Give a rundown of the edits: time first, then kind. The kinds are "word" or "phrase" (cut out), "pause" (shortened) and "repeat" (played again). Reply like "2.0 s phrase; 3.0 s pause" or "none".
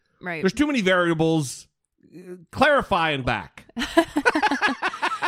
3.2 s word